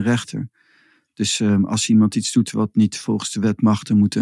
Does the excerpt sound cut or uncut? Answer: uncut